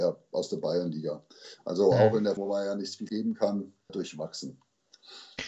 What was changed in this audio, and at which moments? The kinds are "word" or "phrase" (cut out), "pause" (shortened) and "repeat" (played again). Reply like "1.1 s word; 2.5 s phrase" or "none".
2.4 s word; 3.1 s word; 3.9 s word

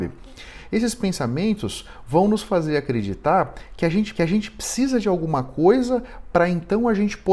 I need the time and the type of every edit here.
4.1 s repeat

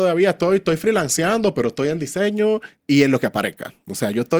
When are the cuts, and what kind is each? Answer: none

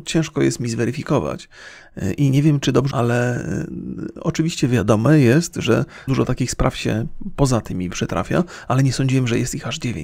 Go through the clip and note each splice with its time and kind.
2.9 s word; 6.1 s word; 7.9 s word

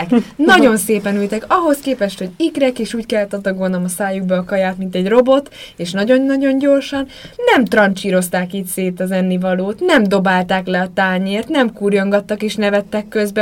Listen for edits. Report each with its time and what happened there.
7.4 s pause

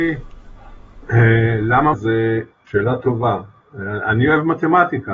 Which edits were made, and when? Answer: 1.9 s word; 2.7 s word

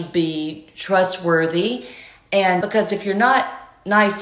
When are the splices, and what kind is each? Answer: 2.6 s word

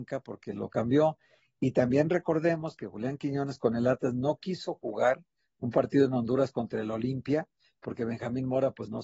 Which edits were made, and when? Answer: none

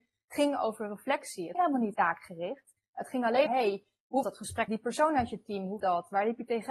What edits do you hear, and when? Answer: 1.5 s word; 1.9 s word; 3.5 s word; 4.2 s word; 4.7 s word; 5.8 s word

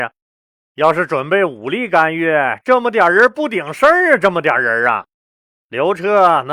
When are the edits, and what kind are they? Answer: none

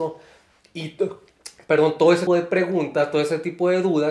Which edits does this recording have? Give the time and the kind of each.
2.3 s word

